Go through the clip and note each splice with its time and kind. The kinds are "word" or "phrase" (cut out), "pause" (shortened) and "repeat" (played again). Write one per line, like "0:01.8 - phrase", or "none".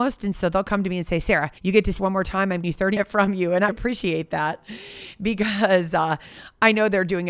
0:01.6 - pause
0:02.0 - word
0:02.6 - word
0:03.0 - phrase
0:03.7 - word